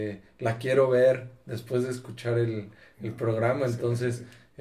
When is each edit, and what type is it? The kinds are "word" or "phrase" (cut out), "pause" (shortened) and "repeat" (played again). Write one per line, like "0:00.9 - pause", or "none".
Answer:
none